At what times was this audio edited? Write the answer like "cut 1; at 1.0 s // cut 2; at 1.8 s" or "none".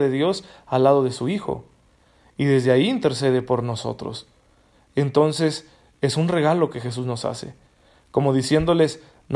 none